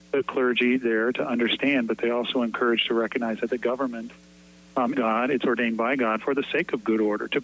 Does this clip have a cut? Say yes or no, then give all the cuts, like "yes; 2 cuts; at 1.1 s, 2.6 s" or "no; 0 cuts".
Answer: yes; 1 cut; at 4.9 s